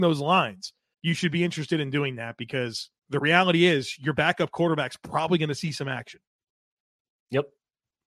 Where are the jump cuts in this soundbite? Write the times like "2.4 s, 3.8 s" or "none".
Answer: 0.9 s, 3.0 s